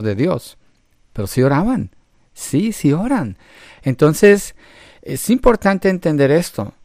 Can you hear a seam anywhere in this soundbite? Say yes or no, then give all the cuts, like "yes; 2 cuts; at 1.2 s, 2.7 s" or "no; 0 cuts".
no; 0 cuts